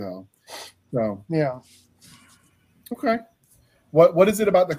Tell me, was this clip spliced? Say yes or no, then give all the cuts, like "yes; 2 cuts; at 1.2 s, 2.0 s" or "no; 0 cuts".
no; 0 cuts